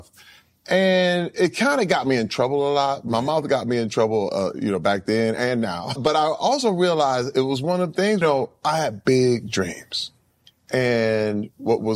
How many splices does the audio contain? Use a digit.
4